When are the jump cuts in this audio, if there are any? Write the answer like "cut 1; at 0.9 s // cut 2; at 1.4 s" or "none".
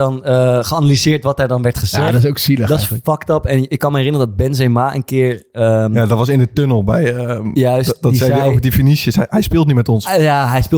none